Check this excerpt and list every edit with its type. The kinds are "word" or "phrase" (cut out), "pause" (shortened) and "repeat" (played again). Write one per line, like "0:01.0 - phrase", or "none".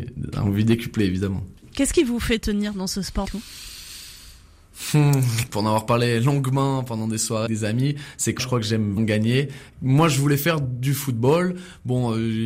0:03.2 - word
0:07.5 - word
0:08.4 - word
0:09.0 - word